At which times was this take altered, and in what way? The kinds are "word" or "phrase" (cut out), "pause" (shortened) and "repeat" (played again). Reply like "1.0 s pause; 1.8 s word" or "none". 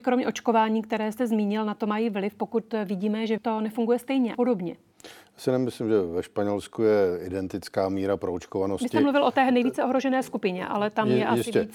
3.4 s phrase; 4.3 s word